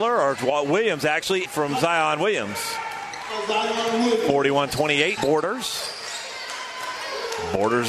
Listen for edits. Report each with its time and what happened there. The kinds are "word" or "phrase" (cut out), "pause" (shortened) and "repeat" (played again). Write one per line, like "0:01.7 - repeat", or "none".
0:01.5 - phrase
0:05.2 - phrase